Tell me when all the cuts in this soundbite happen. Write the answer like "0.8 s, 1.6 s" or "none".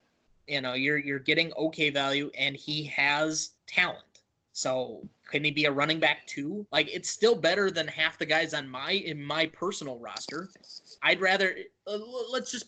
3.6 s, 5.2 s, 6.7 s, 11.0 s